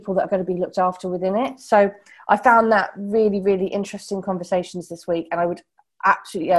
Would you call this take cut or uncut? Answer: uncut